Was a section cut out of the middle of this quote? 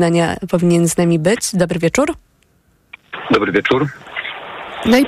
no; 0 cuts

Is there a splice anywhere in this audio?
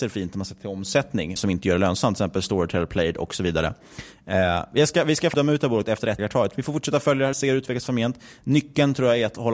yes; 4 cuts; at 1.4 s, 5.3 s, 6.2 s, 7.3 s

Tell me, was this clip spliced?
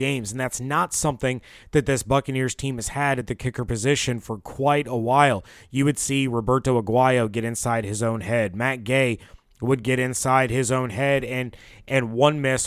no; 0 cuts

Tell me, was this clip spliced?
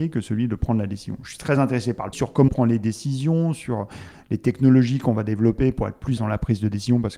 yes; 3 cuts; at 2.1 s, 2.5 s, 6.2 s

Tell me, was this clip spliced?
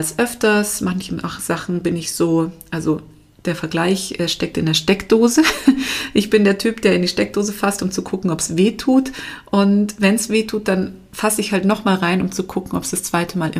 no; 0 cuts

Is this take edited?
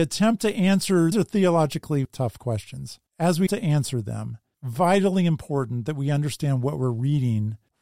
yes; 5 cuts; at 1.1 s, 2.0 s, 3.1 s, 3.5 s, 4.5 s

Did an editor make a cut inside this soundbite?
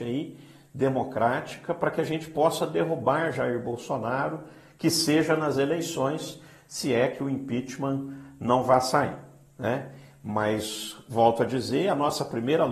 no; 0 cuts

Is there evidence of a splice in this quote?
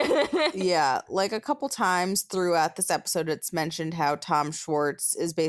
no; 0 cuts

